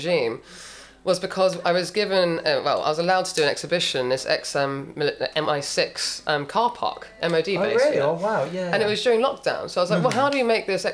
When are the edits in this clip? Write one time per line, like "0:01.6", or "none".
none